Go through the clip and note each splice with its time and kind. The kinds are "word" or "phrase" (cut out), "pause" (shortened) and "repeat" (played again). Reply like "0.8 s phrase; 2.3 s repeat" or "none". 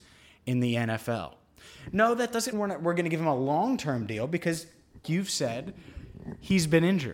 2.5 s word; 5.0 s word